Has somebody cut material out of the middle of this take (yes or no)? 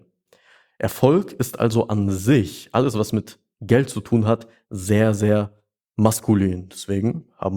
no